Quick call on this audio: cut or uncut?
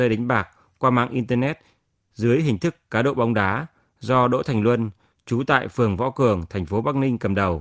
uncut